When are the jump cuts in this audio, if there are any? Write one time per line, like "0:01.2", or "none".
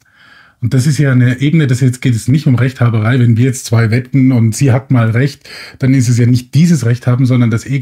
none